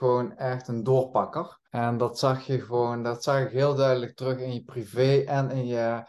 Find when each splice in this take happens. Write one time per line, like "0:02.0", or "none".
0:01.6